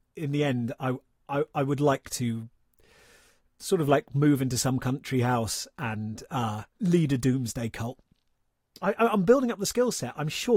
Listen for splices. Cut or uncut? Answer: cut